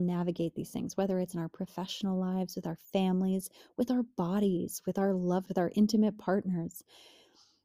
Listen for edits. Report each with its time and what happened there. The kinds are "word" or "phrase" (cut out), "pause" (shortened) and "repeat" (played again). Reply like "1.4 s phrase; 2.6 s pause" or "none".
5.5 s word